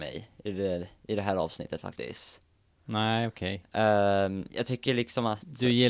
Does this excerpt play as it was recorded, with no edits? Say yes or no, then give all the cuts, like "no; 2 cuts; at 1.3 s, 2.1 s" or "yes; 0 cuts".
yes; 0 cuts